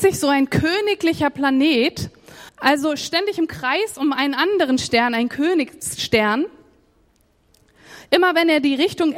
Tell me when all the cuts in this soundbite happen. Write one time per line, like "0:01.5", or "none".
0:02.5